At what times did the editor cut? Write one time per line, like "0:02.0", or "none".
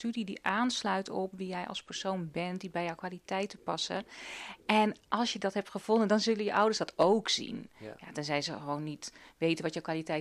none